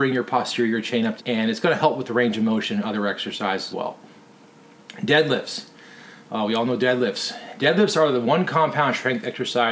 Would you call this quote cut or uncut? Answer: cut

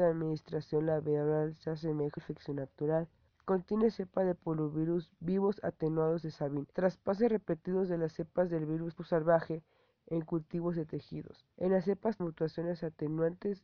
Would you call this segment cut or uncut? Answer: cut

